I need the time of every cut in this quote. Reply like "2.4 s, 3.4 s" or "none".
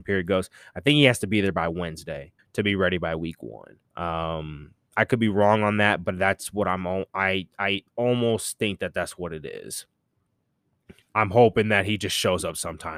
2.4 s, 3.8 s, 7.9 s, 11.0 s

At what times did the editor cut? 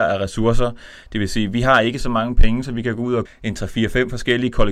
3.3 s

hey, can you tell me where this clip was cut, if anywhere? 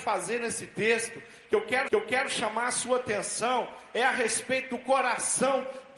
1.9 s

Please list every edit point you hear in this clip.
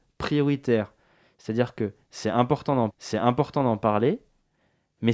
2.9 s

